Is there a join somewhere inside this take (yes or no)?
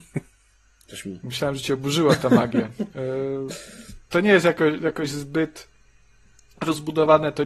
no